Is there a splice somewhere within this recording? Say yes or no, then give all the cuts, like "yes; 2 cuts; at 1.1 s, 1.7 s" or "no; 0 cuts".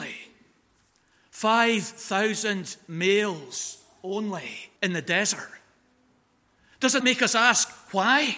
yes; 2 cuts; at 4.8 s, 7.0 s